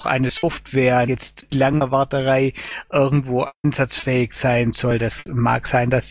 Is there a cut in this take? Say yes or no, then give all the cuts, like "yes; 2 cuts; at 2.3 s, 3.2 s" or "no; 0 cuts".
yes; 2 cuts; at 1.1 s, 1.5 s